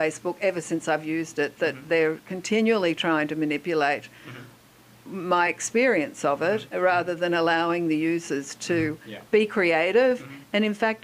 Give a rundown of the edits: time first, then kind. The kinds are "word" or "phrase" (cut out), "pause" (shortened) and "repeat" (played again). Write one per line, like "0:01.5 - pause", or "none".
none